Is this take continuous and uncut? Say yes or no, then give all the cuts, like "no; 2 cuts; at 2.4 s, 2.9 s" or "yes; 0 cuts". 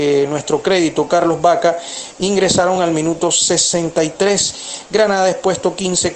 yes; 0 cuts